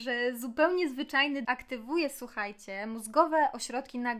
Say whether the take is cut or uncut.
cut